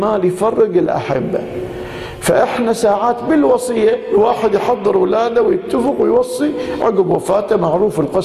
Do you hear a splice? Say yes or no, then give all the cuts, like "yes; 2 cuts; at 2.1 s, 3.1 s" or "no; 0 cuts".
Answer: no; 0 cuts